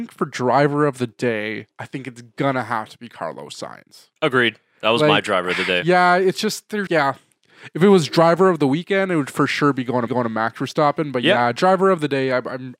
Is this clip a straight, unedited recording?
no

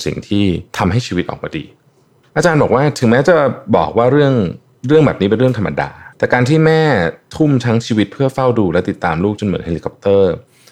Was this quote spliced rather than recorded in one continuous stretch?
yes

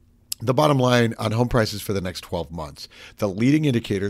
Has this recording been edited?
no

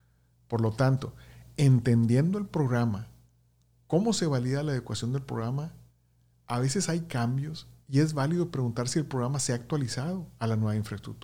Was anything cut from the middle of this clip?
no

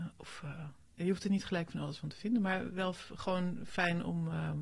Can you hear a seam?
no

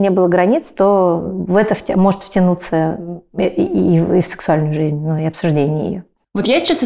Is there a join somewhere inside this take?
no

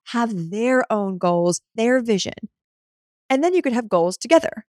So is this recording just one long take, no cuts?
no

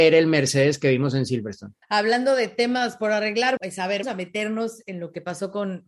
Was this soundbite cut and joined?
yes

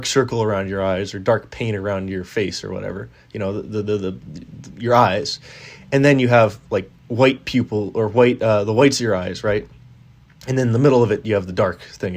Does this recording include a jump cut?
no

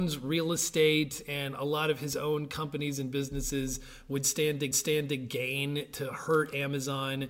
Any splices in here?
yes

